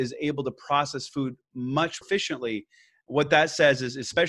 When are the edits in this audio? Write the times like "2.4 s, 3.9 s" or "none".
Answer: 2.0 s